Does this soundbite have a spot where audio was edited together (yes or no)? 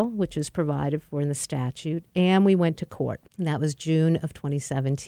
yes